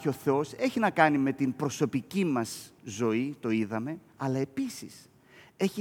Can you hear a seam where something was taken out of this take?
yes; 2 cuts; at 2.8 s, 4.1 s

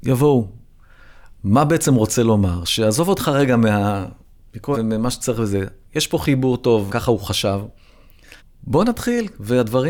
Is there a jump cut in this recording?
yes; 5 cuts; at 1.4 s, 4.7 s, 5.8 s, 6.9 s, 8.4 s

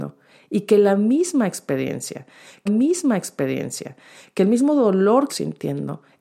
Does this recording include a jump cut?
yes; 2 cuts; at 2.7 s, 5.3 s

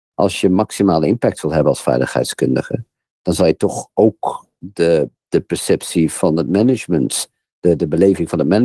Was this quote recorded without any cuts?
yes; 0 cuts

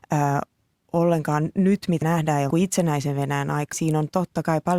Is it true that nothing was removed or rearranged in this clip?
no; 3 cuts; at 2.0 s, 2.5 s, 3.7 s

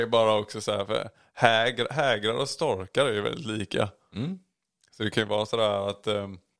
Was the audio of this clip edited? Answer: no; 0 cuts

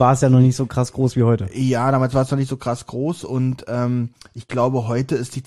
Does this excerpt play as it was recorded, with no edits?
yes; 0 cuts

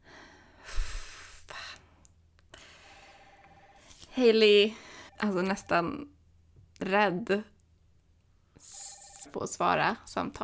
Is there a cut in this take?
yes; 2 cuts; at 5.1 s, 9.3 s

